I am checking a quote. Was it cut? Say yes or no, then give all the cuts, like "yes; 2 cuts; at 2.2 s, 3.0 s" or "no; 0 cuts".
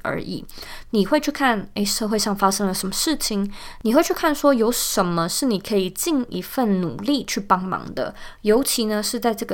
no; 0 cuts